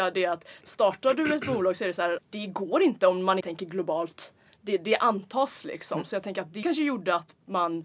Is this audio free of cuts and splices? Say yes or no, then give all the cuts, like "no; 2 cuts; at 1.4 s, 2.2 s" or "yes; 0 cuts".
no; 3 cuts; at 2.2 s, 3.4 s, 6.6 s